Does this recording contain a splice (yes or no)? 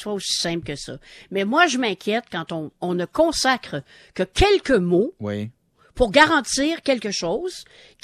no